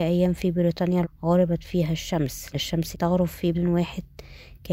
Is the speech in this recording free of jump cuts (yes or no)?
no